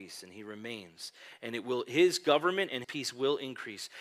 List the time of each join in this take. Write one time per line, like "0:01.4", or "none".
0:02.8